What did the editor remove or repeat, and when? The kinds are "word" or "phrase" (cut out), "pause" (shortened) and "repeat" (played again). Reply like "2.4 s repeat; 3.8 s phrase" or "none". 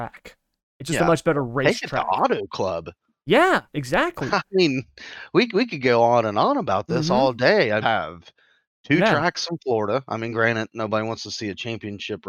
3.7 s pause; 7.8 s phrase